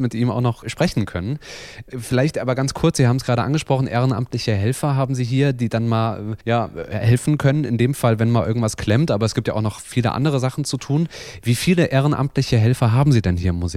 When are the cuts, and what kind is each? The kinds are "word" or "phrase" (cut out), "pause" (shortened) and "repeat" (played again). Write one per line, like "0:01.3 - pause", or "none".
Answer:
0:06.4 - pause